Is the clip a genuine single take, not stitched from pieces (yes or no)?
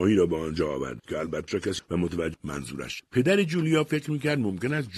no